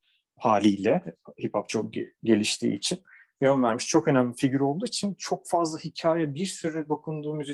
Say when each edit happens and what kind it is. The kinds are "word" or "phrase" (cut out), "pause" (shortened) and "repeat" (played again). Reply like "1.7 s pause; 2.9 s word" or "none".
none